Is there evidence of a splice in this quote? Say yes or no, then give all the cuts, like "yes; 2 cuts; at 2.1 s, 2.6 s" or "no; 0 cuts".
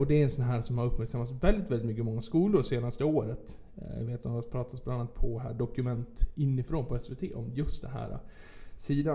no; 0 cuts